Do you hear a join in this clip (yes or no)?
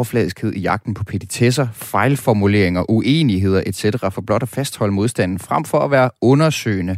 no